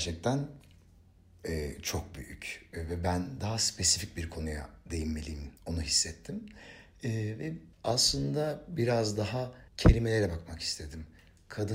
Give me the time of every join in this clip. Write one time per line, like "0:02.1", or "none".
0:05.6
0:07.7
0:09.7